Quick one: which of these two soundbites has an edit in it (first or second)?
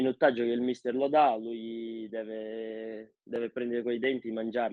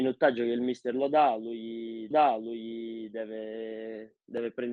second